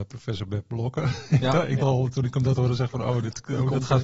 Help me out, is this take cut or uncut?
cut